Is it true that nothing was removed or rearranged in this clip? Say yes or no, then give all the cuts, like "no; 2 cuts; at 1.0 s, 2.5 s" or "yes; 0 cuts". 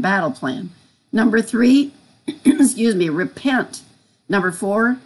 yes; 0 cuts